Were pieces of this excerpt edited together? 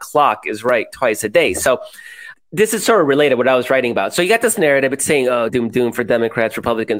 yes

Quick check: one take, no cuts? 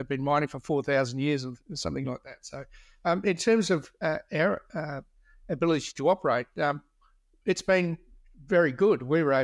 yes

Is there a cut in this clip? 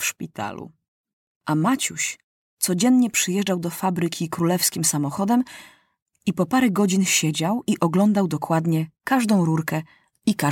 no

